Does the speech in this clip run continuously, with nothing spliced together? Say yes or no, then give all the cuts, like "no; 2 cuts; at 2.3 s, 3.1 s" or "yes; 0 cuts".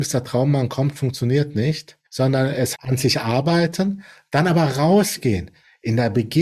no; 2 cuts; at 2.1 s, 2.7 s